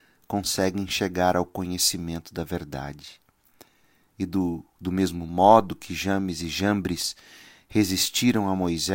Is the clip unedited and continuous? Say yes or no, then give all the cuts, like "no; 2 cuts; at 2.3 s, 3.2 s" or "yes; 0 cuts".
yes; 0 cuts